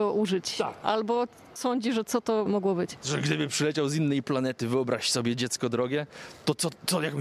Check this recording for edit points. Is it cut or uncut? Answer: cut